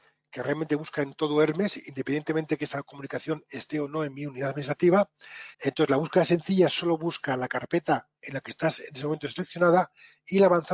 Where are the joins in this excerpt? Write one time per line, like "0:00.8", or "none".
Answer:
0:05.5